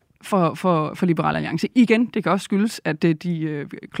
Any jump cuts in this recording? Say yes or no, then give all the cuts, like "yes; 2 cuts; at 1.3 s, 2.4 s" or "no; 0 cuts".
no; 0 cuts